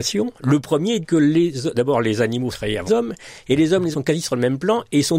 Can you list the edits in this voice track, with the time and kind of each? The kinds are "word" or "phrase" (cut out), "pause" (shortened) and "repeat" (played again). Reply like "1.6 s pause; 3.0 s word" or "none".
1.0 s word; 2.5 s word; 2.9 s word; 3.9 s word